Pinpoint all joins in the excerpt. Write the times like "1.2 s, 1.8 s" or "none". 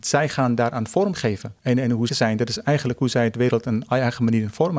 1.6 s, 2.1 s